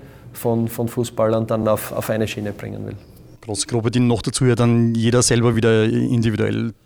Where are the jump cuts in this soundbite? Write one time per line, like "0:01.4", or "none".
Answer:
none